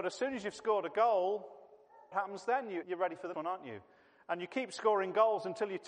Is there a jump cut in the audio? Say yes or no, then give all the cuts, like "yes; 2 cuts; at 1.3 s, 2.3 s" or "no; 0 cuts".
yes; 3 cuts; at 2.1 s, 2.8 s, 3.3 s